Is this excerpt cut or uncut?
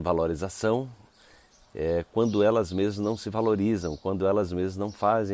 uncut